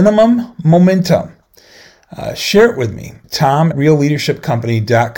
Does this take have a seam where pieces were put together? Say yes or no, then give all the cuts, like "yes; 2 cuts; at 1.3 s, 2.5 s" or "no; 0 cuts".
yes; 2 cuts; at 3.2 s, 3.7 s